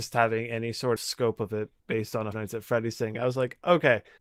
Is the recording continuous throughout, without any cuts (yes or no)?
no